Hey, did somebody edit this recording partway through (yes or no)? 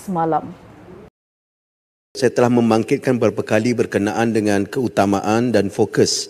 no